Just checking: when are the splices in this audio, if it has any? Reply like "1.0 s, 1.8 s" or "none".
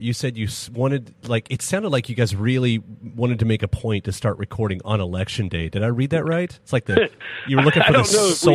6.6 s